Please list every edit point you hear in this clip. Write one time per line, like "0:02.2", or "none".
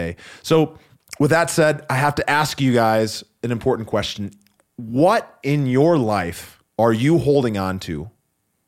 0:06.7